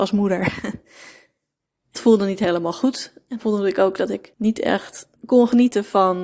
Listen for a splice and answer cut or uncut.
cut